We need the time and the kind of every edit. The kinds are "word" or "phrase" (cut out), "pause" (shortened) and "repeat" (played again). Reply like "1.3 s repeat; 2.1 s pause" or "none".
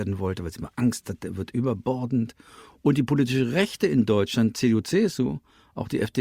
none

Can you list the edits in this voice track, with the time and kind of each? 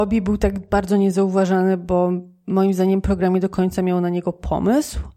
none

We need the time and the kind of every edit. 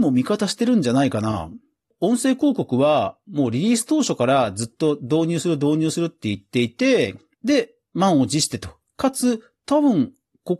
none

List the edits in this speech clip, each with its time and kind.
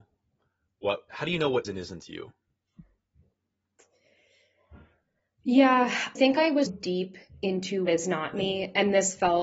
1.1 s word; 1.6 s word; 6.2 s word; 6.7 s word; 7.9 s word

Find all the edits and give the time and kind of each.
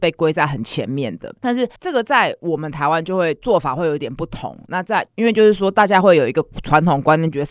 1.8 s pause; 5.1 s pause

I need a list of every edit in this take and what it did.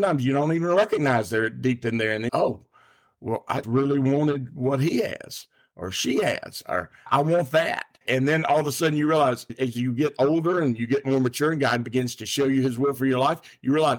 2.3 s phrase; 3.6 s word; 8.0 s pause

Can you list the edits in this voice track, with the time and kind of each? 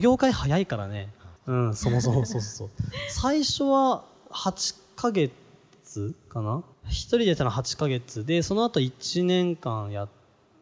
1.4 s pause; 6.7 s pause

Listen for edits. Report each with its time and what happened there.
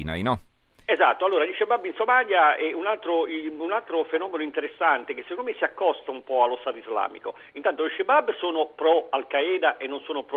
none

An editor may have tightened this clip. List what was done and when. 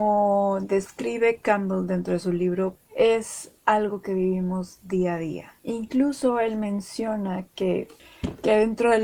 2.8 s pause; 5.6 s pause

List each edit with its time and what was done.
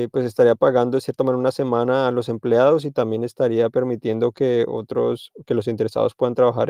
none

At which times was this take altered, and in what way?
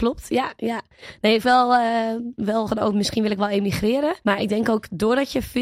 1.4 s phrase; 2.7 s word; 4.2 s pause

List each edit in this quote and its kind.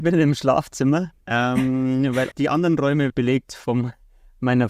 1.2 s pause; 2.3 s word; 3.1 s phrase

